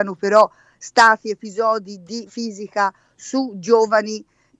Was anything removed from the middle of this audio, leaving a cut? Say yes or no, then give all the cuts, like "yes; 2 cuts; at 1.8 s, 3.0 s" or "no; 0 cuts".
yes; 1 cut; at 2.3 s